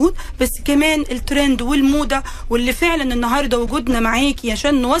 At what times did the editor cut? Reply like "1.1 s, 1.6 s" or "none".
none